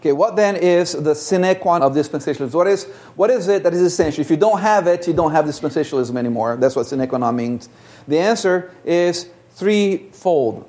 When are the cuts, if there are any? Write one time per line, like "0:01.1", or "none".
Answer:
0:01.8